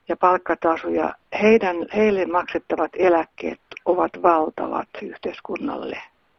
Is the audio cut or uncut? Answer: uncut